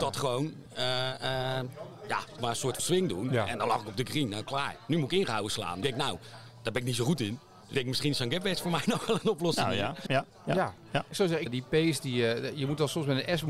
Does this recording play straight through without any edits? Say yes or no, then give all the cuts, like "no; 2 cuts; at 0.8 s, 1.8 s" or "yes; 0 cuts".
no; 7 cuts; at 2.4 s, 2.8 s, 5.8 s, 7.7 s, 10.1 s, 11.1 s, 11.5 s